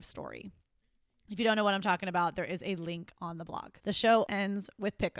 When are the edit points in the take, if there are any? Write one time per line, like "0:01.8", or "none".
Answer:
0:03.8
0:04.3